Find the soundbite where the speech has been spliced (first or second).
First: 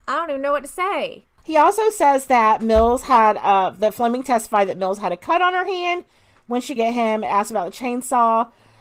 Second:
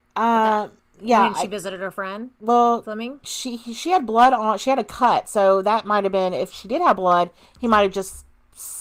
first